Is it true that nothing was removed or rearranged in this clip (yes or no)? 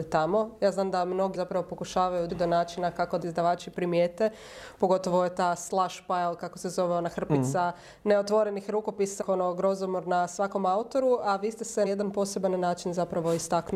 no